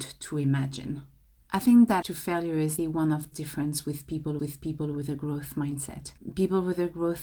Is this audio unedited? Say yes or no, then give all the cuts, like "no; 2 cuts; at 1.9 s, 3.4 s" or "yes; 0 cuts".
no; 5 cuts; at 1.3 s, 2.0 s, 2.8 s, 3.3 s, 4.4 s